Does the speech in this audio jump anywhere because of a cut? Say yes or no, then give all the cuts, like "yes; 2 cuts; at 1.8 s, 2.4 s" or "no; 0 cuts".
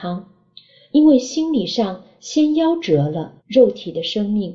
yes; 1 cut; at 3.4 s